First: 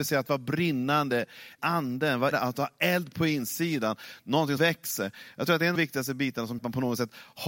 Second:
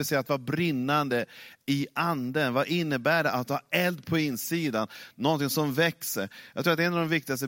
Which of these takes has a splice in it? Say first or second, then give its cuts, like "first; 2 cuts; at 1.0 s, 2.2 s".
first; 5 cuts; at 1.6 s, 2.3 s, 4.6 s, 5.8 s, 6.6 s